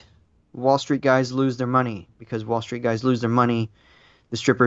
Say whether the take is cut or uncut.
uncut